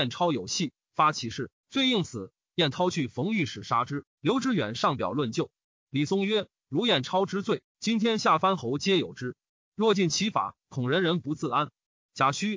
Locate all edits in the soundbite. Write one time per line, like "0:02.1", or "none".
none